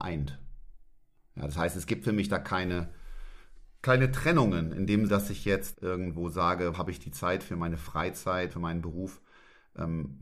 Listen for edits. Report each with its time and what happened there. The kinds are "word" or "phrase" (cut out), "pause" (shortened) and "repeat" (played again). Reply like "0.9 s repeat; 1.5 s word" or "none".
5.1 s word; 5.7 s word; 6.7 s word; 8.5 s word